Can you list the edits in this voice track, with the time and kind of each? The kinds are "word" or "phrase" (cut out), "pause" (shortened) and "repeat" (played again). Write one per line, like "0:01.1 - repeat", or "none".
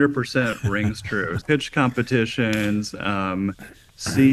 0:01.4 - word